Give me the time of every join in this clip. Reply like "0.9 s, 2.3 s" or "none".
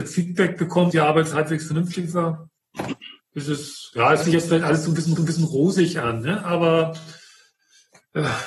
0.9 s, 1.3 s, 3.2 s, 4.2 s, 5.2 s